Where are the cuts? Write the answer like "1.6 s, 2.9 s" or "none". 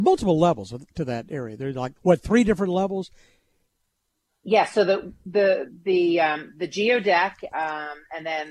2.0 s